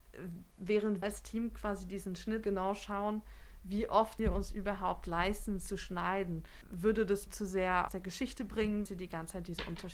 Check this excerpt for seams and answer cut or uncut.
cut